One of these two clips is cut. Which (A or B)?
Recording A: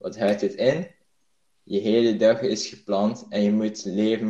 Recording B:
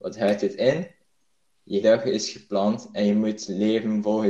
B